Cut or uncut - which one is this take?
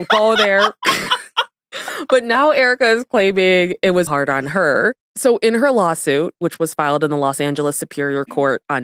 cut